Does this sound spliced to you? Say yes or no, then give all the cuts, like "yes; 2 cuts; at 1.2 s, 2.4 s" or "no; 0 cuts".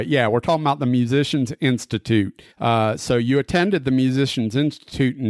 yes; 1 cut; at 2.5 s